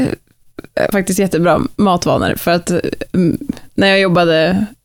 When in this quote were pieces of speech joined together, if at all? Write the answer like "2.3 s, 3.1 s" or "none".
0.9 s